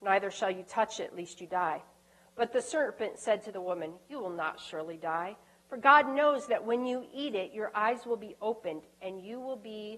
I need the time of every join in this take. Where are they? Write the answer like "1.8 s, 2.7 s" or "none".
none